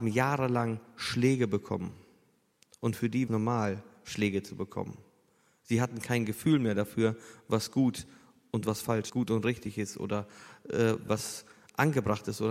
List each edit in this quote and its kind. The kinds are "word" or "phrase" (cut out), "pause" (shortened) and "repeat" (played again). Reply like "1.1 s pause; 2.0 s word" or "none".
3.3 s phrase; 9.1 s phrase; 11.1 s phrase